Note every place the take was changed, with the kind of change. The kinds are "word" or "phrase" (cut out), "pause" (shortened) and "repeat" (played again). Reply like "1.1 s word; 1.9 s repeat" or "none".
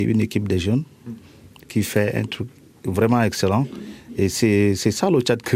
none